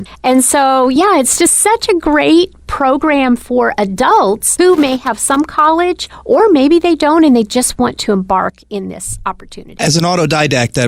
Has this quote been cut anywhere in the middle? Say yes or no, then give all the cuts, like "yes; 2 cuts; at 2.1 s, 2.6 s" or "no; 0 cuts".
no; 0 cuts